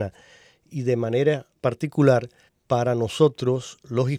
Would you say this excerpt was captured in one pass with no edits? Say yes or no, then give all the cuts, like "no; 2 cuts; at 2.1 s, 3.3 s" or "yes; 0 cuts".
no; 2 cuts; at 1.6 s, 2.5 s